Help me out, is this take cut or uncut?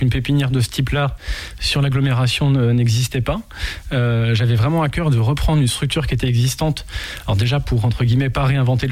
uncut